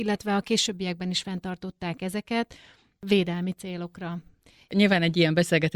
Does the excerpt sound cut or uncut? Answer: uncut